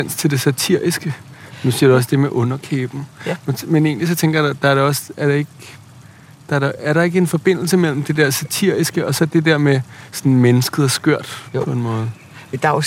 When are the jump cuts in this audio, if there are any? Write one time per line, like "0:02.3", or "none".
none